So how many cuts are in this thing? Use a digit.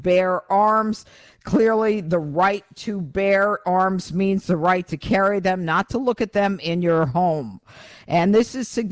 0